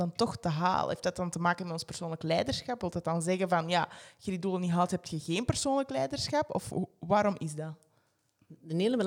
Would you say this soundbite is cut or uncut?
uncut